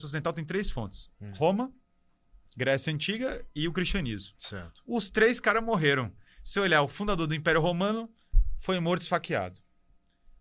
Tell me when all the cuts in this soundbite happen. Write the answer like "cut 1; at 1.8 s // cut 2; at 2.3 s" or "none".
none